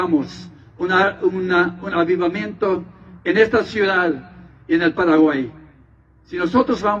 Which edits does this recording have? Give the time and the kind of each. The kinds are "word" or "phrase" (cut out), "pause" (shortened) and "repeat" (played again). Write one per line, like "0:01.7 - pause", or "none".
none